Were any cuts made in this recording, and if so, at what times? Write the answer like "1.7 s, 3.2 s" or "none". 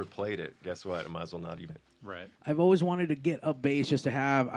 1.7 s, 2.4 s

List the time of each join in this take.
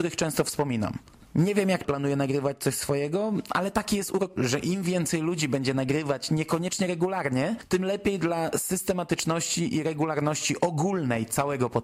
1.8 s, 4.4 s

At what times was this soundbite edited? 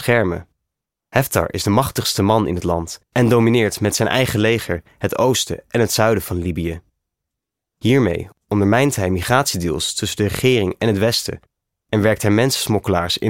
3.0 s

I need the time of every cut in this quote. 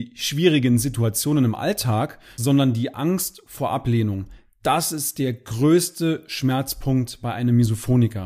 none

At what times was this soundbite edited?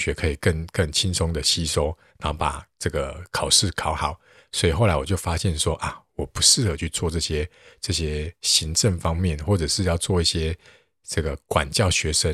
none

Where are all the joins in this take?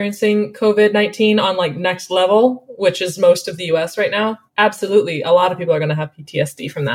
4.5 s

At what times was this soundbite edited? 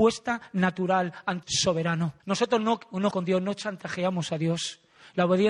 1.4 s, 2.2 s, 3.1 s

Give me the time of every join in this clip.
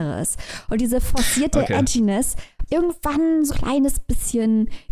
2.7 s, 3.5 s

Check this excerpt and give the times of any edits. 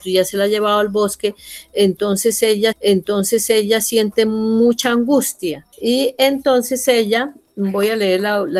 2.7 s, 5.7 s

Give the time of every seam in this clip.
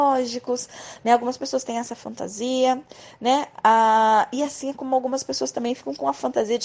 none

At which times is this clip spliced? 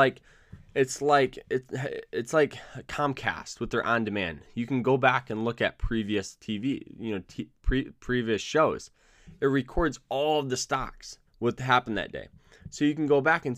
11.3 s

